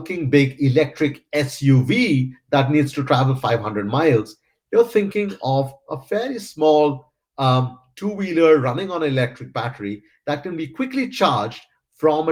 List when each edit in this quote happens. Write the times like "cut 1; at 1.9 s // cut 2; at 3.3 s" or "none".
none

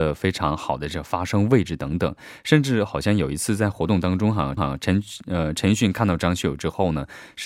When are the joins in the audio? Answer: cut 1; at 4.6 s

